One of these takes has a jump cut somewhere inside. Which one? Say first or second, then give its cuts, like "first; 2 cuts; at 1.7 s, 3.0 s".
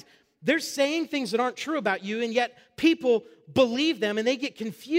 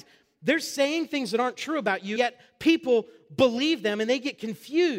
second; 1 cut; at 2.2 s